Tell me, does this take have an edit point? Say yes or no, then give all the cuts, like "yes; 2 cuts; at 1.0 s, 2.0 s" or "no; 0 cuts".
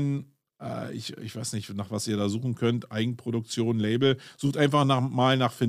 no; 0 cuts